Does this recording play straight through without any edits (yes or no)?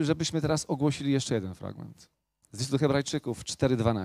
yes